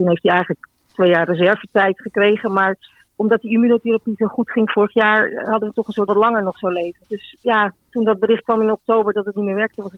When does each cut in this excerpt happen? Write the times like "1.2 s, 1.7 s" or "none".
3.1 s, 6.1 s, 7.0 s